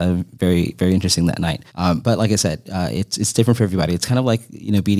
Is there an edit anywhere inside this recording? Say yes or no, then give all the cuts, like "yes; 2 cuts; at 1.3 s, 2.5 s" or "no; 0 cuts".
yes; 1 cut; at 1.7 s